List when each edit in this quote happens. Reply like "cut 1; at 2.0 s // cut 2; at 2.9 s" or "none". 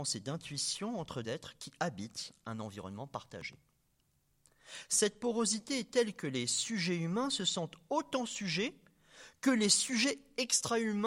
cut 1; at 1.2 s